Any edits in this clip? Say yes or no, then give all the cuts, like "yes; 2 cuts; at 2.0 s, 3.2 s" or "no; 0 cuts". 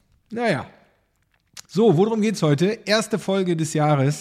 yes; 1 cut; at 1.6 s